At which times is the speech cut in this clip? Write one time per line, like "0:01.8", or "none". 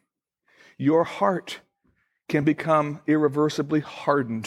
none